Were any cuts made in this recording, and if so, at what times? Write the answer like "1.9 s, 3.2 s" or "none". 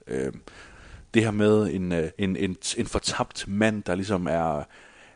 2.1 s